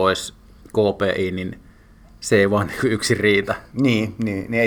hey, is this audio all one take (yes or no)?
yes